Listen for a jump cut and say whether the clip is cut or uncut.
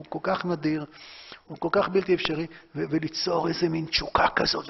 uncut